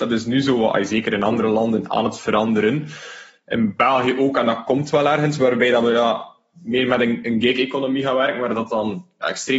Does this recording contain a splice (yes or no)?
no